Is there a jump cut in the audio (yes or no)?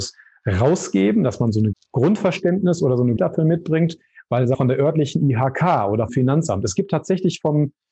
yes